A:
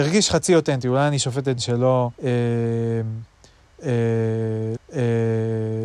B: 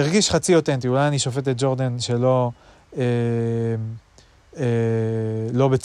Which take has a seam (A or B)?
A